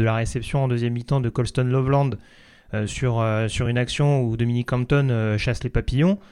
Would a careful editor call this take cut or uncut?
uncut